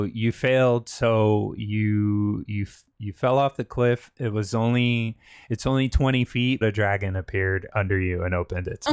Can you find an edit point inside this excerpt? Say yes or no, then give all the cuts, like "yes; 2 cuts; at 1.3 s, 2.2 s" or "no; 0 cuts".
yes; 1 cut; at 6.6 s